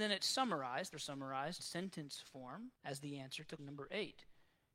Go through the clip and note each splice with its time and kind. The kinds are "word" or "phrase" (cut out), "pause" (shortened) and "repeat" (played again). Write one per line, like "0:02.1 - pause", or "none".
0:00.9 - phrase
0:01.6 - word
0:02.7 - pause
0:03.6 - word